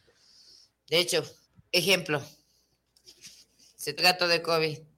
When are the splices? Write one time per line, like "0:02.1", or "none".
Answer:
0:01.4
0:04.0